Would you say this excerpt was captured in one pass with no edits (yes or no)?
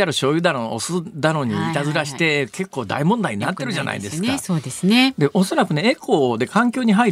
yes